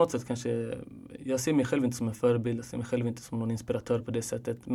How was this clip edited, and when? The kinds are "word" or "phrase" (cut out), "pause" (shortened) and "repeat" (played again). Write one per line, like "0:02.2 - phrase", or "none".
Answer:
none